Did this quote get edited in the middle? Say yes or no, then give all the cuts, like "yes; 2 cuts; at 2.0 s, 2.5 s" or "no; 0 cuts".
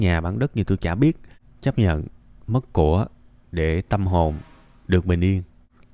no; 0 cuts